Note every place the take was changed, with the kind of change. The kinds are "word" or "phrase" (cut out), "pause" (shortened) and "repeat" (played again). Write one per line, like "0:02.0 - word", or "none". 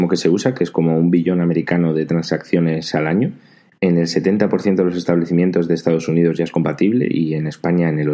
none